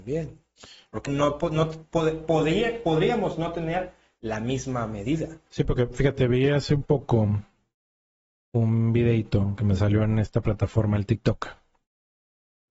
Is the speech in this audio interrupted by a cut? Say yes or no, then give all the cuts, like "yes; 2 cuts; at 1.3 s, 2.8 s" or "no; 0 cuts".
yes; 2 cuts; at 1.0 s, 5.5 s